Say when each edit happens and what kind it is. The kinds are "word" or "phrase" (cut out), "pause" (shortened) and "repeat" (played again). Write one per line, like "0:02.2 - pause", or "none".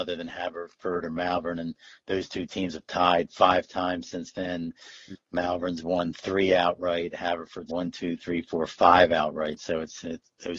0:07.7 - word

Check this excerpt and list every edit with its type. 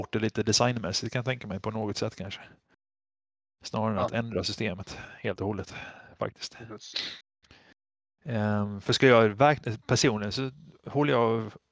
none

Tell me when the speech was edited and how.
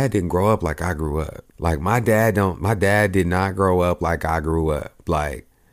0:01.5 - pause

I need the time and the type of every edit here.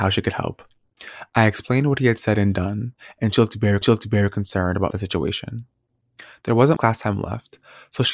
0:03.8 - repeat
0:04.9 - phrase
0:06.8 - word

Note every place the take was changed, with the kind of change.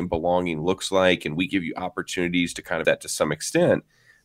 0:01.5 - word
0:02.8 - word

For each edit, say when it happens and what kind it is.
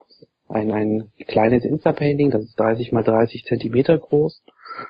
none

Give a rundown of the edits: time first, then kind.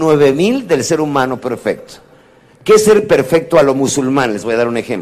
none

